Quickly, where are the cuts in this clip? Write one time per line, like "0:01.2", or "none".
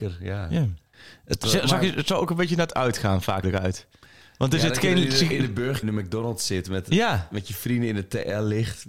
0:03.4
0:05.8